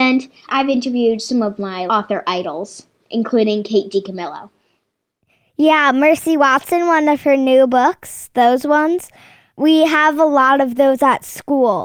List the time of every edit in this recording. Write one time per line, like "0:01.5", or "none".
0:01.9

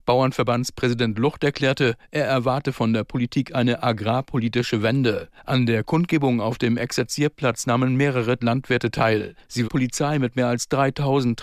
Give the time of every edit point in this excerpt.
0:08.4
0:09.6

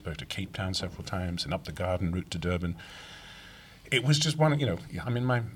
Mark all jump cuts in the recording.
none

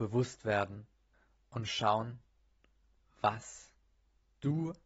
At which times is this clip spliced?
0:01.1
0:03.9

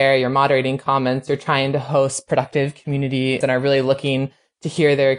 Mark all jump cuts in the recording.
0:03.4

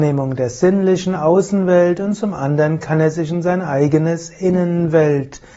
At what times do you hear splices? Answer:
none

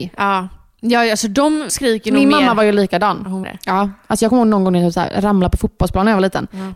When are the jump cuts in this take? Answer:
0:01.7
0:03.4

